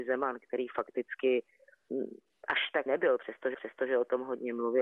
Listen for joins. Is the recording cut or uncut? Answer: cut